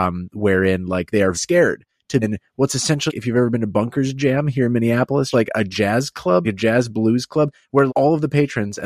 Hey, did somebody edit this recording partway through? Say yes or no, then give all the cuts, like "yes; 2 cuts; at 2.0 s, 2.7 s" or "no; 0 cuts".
yes; 6 cuts; at 1.3 s, 2.2 s, 3.1 s, 5.3 s, 6.4 s, 7.9 s